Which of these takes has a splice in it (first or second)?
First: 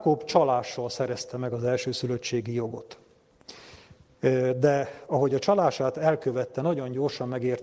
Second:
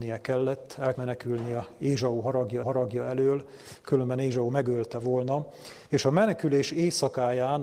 second